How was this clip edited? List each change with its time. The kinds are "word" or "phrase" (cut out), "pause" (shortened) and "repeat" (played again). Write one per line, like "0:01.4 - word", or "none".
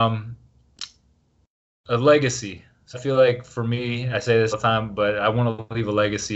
0:02.9 - word
0:04.1 - word
0:04.5 - word